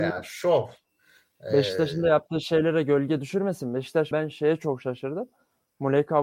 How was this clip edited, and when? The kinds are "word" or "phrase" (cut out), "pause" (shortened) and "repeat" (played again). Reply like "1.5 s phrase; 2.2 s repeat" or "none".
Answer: 4.1 s word